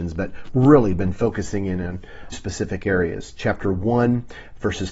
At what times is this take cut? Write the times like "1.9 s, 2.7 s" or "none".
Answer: 2.3 s